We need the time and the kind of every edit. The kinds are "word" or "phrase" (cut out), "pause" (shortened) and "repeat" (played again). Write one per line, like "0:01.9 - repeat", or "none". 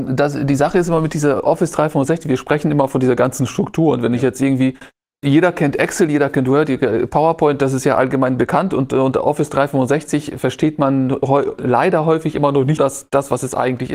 0:12.8 - word